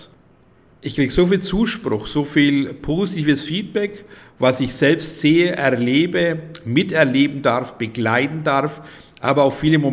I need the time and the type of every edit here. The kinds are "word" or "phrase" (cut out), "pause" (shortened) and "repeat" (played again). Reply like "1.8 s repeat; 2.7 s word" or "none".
none

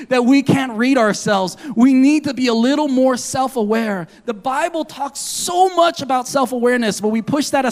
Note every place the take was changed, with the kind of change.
none

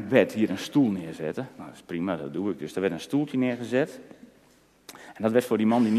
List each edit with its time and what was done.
none

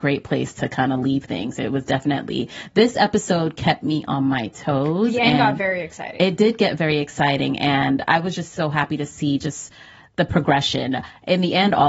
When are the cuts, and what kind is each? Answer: none

